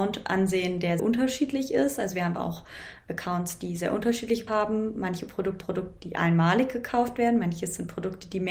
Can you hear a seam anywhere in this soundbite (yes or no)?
yes